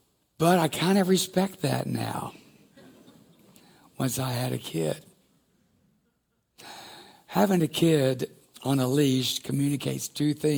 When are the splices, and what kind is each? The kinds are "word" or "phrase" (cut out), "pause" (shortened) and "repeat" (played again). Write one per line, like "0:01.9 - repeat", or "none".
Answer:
0:07.1 - pause